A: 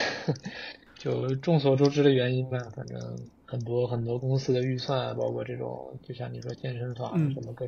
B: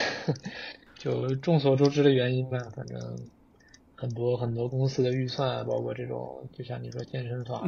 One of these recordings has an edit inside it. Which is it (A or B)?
A